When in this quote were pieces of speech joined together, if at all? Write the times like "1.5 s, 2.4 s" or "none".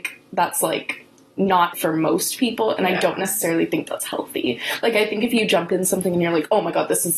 1.7 s